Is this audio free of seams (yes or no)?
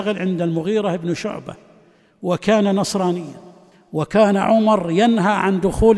yes